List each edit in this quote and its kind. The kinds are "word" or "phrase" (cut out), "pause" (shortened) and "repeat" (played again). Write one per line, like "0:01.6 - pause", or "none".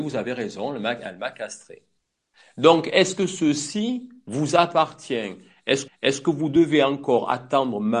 0:05.9 - repeat